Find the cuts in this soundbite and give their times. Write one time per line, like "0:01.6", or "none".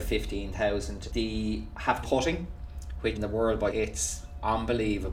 0:01.1
0:02.0
0:03.2
0:03.7